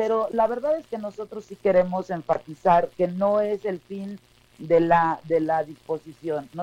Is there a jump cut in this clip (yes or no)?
no